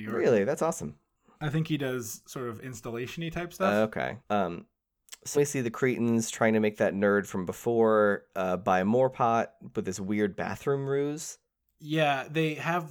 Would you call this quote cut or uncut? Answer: cut